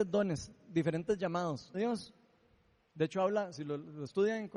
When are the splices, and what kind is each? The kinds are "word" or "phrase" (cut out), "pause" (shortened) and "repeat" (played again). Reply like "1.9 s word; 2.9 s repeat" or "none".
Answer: 1.7 s phrase